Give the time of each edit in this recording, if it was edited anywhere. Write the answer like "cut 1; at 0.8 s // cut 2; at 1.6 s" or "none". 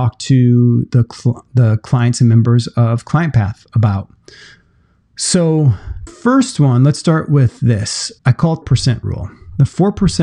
cut 1; at 6.1 s // cut 2; at 8.2 s // cut 3; at 8.6 s